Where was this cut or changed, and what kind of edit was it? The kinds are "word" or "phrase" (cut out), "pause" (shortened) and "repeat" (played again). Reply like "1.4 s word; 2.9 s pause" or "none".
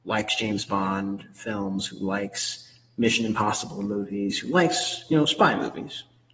none